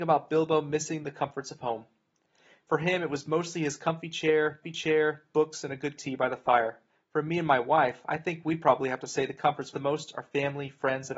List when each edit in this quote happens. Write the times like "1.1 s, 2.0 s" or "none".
4.6 s, 6.0 s, 6.9 s, 9.7 s